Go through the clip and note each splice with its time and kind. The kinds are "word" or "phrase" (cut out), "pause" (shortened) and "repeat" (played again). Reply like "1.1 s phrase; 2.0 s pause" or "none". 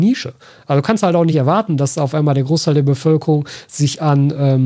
none